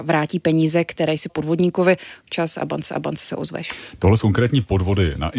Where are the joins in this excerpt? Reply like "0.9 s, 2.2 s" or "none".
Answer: 1.3 s, 2.3 s, 2.9 s, 4.2 s